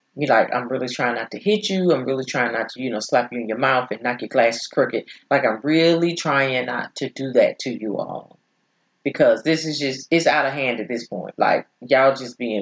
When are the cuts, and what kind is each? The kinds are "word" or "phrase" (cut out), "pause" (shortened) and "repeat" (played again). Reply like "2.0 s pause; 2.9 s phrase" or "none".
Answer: none